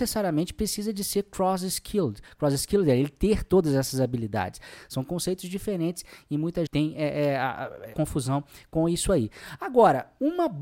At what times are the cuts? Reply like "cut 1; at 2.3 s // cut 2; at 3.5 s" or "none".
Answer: cut 1; at 6.7 s // cut 2; at 7.9 s